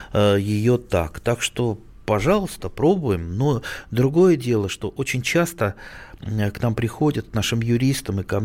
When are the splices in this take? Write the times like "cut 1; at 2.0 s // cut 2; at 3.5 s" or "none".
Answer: none